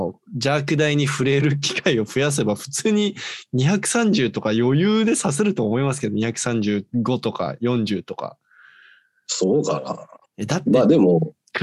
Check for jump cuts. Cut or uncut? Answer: uncut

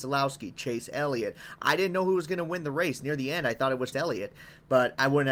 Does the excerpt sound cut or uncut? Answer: cut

